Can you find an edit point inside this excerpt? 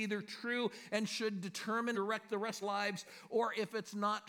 yes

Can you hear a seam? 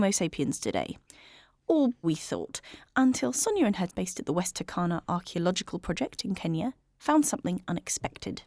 yes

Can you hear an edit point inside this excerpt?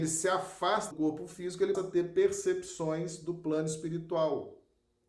yes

